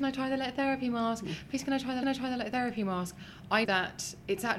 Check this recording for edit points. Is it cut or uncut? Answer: cut